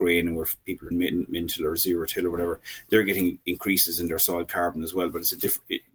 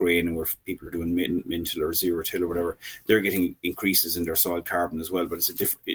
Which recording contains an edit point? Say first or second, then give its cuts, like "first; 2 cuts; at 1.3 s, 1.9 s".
first; 1 cut; at 0.9 s